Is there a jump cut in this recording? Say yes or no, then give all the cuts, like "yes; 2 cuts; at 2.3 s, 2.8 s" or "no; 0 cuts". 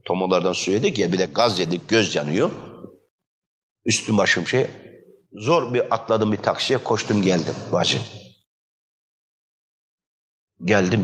no; 0 cuts